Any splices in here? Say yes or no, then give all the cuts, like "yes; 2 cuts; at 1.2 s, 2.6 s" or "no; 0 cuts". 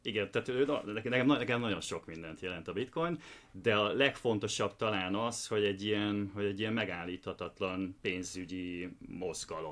no; 0 cuts